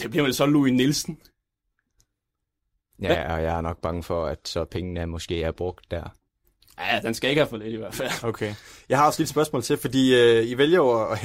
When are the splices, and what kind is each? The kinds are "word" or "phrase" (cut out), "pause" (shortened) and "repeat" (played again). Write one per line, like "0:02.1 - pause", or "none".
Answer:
none